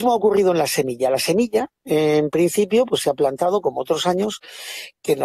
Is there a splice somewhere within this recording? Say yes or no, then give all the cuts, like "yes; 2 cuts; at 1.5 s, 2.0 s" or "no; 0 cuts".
no; 0 cuts